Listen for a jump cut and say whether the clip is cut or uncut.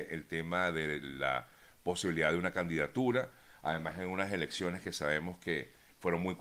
cut